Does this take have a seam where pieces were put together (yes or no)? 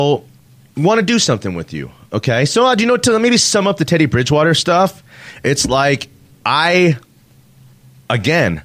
no